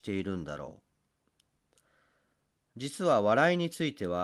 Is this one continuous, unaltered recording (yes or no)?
yes